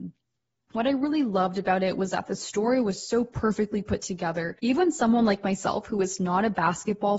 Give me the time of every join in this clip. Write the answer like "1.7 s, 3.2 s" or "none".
4.6 s

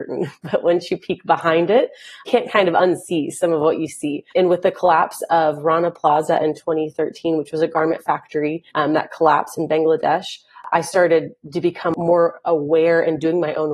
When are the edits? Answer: 4.3 s, 8.7 s

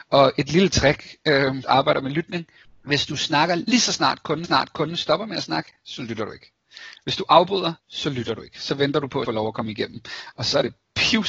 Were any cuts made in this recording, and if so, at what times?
1.6 s, 2.6 s, 4.4 s, 7.8 s, 9.2 s

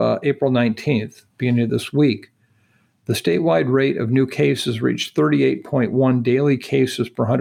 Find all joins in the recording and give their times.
none

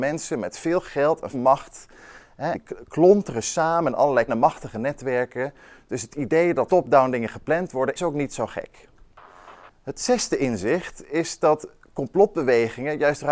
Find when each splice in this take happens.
1.3 s, 2.5 s, 4.3 s, 6.7 s, 8.0 s

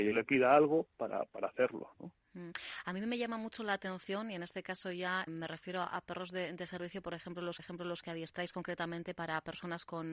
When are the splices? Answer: 5.3 s, 7.6 s

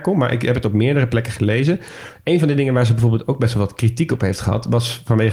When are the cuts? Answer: none

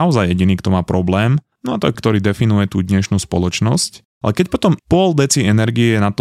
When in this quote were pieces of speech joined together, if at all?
1.9 s, 4.8 s

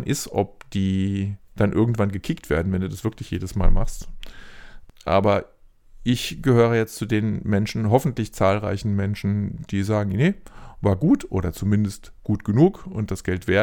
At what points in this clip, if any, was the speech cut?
1.4 s

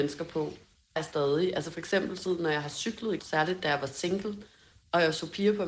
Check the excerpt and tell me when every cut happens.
1.0 s, 2.2 s, 3.2 s

